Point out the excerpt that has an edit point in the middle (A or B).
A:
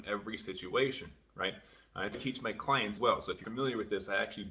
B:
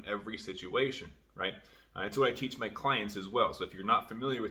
A